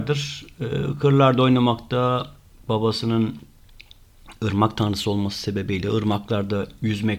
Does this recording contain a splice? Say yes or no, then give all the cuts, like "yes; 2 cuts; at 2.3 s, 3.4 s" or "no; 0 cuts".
no; 0 cuts